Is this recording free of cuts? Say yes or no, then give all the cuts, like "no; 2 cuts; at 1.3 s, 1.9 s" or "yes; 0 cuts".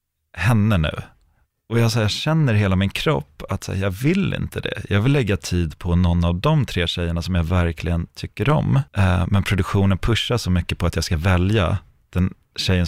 no; 1 cut; at 8.9 s